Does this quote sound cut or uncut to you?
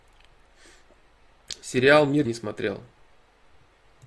cut